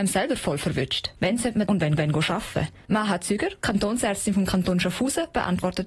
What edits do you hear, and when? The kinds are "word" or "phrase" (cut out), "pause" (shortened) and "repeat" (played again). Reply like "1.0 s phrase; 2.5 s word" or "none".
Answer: 1.2 s pause; 1.7 s phrase; 2.0 s repeat

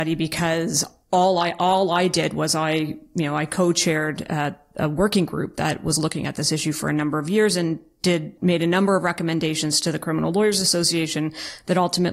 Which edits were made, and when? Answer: 8.4 s word

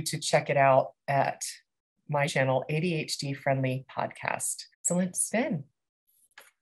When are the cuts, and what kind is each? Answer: 2.3 s word; 4.7 s pause; 5.3 s word

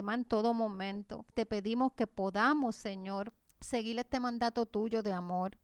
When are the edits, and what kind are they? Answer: 1.3 s pause; 3.4 s pause

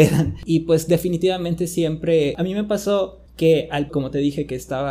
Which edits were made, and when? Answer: 3.3 s pause; 3.9 s word

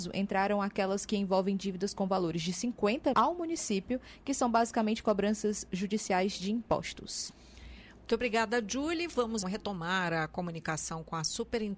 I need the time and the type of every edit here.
3.1 s word; 9.4 s word

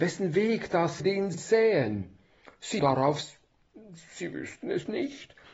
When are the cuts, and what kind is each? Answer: 1.0 s word; 1.3 s word; 2.8 s word

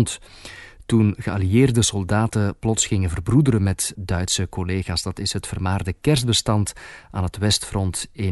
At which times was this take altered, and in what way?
3.9 s word

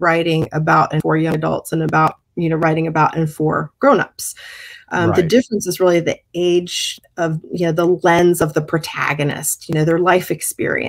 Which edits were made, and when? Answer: 2.2 s pause

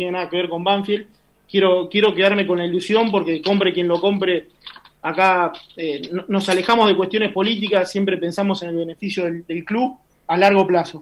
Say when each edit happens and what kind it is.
none

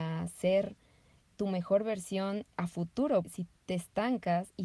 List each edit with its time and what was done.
2.5 s pause; 3.2 s word; 3.6 s word

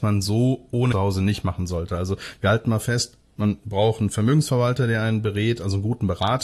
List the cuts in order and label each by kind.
0.9 s phrase

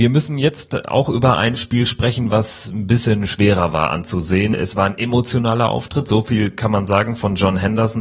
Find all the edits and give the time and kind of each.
none

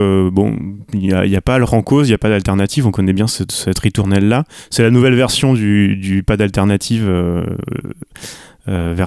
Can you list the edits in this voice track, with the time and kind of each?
1.7 s word

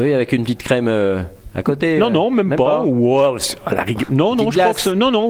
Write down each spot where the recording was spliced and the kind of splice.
none

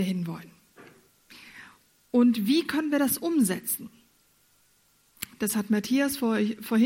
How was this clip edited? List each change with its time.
none

